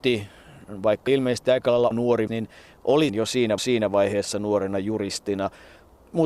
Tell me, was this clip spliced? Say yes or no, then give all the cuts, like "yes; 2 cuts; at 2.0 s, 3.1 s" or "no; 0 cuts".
yes; 5 cuts; at 1.1 s, 1.9 s, 2.3 s, 3.1 s, 3.6 s